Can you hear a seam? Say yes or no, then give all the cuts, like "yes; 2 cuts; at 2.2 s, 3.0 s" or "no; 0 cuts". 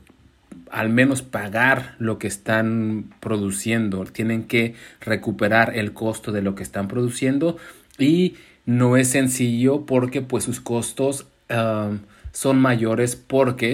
no; 0 cuts